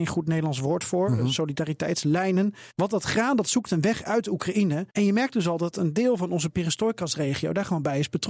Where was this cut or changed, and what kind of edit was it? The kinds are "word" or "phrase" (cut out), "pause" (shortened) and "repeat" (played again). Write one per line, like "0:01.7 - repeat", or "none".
0:02.7 - pause
0:04.9 - pause